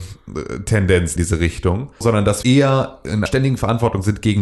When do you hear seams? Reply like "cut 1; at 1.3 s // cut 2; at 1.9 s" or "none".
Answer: cut 1; at 1.2 s // cut 2; at 2.0 s // cut 3; at 2.4 s // cut 4; at 3.3 s